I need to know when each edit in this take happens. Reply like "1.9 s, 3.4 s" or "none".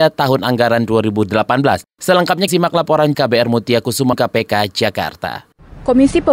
2.5 s, 3.1 s, 4.1 s